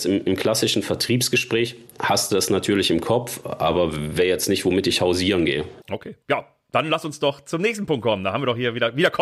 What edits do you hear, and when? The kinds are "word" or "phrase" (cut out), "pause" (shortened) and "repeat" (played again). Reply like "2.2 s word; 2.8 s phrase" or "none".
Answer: 6.2 s pause